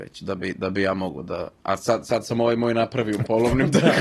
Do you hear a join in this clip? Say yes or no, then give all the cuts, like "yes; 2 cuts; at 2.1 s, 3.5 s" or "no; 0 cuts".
yes; 1 cut; at 1.6 s